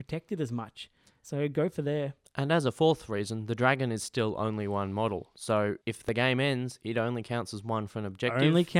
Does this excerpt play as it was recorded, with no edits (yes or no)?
no